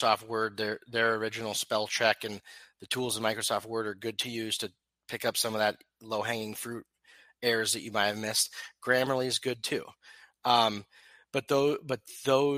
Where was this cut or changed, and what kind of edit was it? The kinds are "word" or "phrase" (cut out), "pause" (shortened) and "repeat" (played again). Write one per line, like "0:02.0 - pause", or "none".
none